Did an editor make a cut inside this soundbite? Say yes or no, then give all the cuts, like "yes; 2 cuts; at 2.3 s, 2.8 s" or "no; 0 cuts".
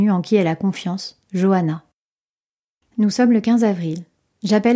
no; 0 cuts